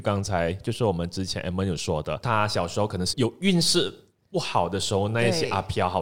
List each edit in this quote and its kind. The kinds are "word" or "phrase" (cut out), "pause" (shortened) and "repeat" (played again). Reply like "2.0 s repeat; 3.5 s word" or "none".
2.2 s word